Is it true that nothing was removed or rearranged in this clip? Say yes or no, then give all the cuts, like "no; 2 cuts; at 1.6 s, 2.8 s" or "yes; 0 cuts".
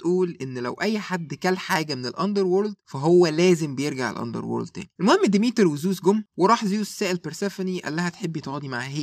yes; 0 cuts